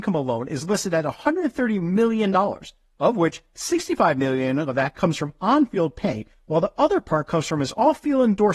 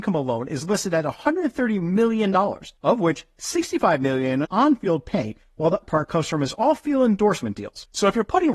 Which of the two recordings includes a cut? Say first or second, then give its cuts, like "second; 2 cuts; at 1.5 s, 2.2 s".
second; 3 cuts; at 2.8 s, 4.4 s, 5.8 s